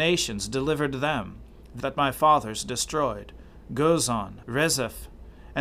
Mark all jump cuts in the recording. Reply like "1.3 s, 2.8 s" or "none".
1.8 s, 4.4 s